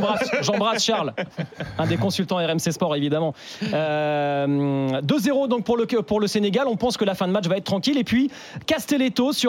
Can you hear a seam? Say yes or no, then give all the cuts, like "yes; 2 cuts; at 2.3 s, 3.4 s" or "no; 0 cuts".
no; 0 cuts